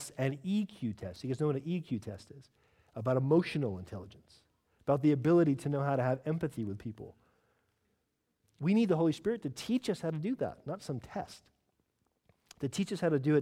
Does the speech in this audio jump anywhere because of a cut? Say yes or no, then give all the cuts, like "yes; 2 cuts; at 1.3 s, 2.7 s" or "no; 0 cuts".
no; 0 cuts